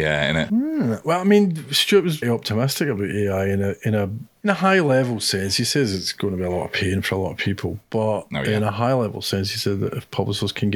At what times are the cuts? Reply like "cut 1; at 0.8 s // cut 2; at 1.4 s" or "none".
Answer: cut 1; at 2.2 s